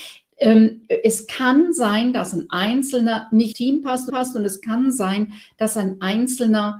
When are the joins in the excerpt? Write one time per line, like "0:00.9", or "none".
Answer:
0:03.5
0:04.1